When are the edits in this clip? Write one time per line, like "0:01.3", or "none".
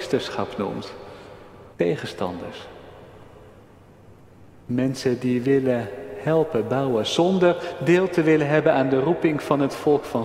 0:01.7